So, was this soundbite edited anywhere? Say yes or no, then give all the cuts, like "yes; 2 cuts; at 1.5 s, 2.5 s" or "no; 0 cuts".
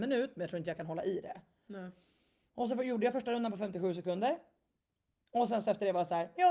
no; 0 cuts